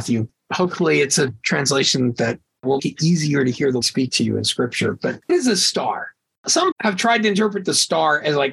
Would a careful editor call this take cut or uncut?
cut